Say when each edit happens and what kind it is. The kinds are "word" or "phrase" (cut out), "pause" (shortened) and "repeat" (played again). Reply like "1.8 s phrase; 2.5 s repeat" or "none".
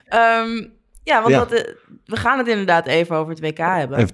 none